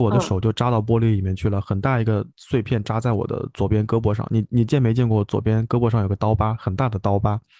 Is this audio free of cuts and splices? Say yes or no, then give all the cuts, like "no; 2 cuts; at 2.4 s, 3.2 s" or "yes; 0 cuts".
no; 1 cut; at 2.3 s